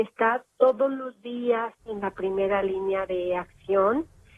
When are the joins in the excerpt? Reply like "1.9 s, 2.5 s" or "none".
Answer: none